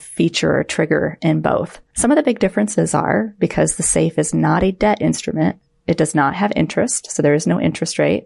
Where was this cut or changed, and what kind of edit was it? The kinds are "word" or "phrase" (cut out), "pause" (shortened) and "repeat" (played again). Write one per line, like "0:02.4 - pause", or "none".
none